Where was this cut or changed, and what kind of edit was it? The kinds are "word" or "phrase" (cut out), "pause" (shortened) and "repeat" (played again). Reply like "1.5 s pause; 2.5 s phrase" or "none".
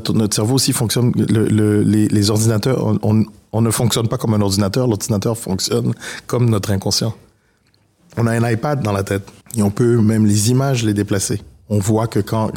none